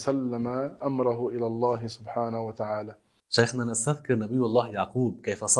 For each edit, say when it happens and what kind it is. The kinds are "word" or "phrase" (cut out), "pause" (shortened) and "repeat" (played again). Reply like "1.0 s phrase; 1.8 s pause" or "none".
none